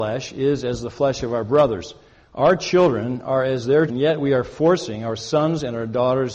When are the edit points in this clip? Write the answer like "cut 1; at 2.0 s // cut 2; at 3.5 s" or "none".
cut 1; at 3.9 s